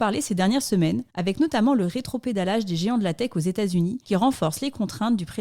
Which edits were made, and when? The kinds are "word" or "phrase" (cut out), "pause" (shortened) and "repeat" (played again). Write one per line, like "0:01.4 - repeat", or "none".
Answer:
0:01.1 - pause
0:04.0 - pause